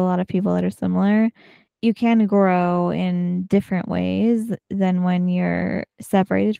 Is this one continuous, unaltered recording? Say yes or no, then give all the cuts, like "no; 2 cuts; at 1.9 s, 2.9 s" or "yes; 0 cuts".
yes; 0 cuts